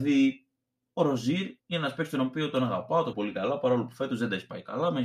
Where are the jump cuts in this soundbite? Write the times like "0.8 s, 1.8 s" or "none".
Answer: 1.6 s, 3.1 s

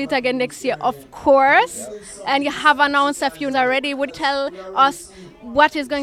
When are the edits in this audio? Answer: 3.5 s, 4.1 s

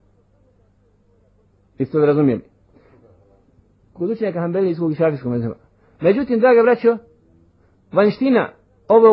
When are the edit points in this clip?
none

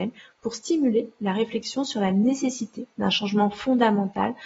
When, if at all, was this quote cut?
none

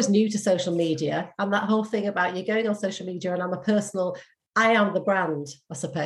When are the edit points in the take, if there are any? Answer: none

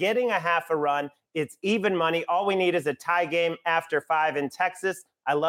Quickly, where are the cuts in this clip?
none

